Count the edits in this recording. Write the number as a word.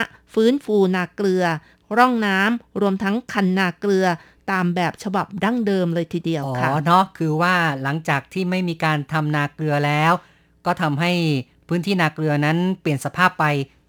zero